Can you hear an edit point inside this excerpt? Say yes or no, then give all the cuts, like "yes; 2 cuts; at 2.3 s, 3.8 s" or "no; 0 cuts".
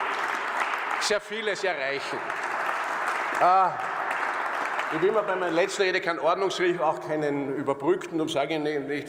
no; 0 cuts